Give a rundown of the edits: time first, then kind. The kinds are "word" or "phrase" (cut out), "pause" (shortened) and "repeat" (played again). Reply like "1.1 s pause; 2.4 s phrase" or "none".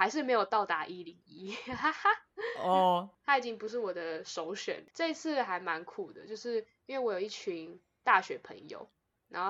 4.9 s pause